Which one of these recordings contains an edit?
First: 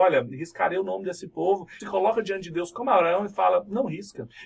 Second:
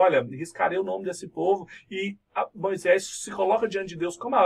first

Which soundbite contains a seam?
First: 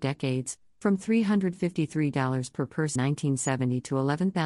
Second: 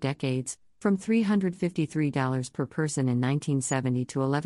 first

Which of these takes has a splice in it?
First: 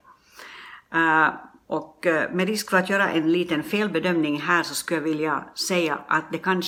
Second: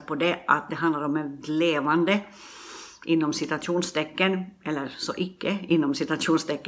second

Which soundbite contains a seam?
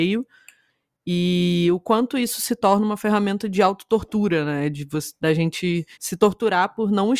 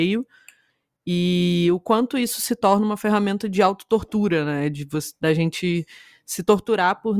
first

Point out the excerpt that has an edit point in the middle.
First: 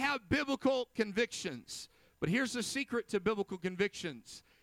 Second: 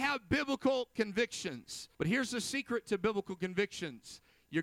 second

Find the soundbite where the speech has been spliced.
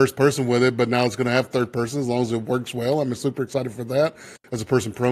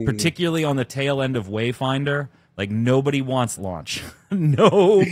second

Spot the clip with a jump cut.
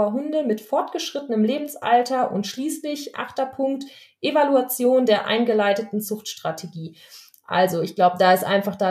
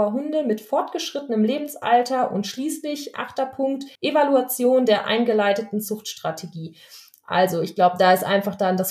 second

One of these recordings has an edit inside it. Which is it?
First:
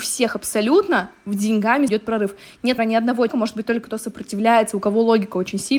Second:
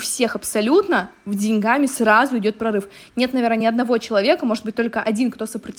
first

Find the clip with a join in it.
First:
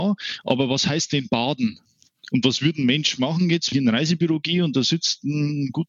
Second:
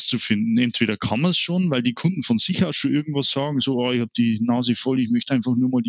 first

